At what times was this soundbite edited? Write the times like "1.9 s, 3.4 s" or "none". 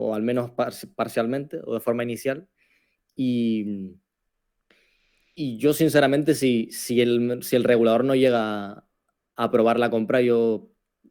none

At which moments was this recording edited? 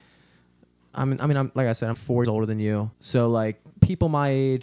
1.9 s, 2.2 s, 2.9 s, 3.7 s

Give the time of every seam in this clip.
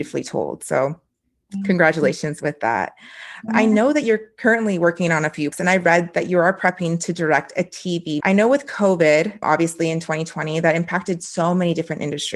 3.5 s, 5.5 s, 8.2 s, 9.4 s

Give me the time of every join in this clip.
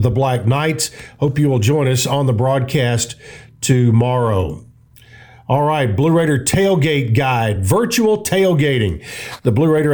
none

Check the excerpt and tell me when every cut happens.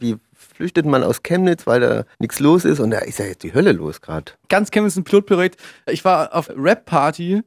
2.1 s, 6.5 s

